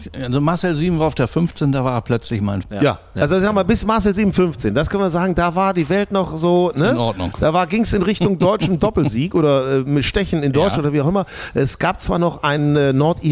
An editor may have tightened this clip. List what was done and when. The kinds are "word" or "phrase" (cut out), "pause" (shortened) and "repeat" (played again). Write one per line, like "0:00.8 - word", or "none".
0:02.6 - word